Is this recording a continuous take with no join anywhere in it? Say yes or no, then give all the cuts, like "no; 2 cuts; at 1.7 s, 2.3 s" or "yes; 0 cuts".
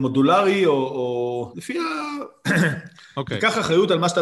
no; 1 cut; at 1.5 s